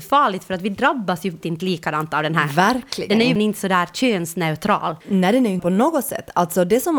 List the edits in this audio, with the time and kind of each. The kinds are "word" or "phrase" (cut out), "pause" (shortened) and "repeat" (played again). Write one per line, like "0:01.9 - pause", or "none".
0:01.4 - word
0:03.4 - word
0:05.0 - pause
0:05.6 - word